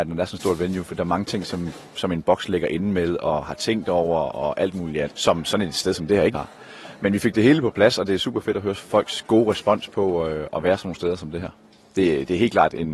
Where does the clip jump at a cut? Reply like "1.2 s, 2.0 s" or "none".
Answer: 5.0 s, 6.3 s